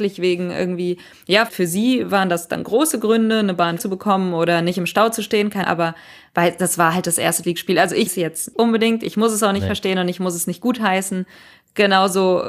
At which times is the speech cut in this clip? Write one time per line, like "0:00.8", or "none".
0:01.5
0:03.8
0:05.6
0:07.4
0:08.1
0:08.5